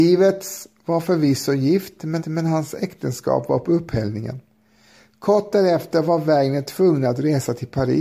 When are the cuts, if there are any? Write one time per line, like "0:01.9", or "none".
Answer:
0:02.2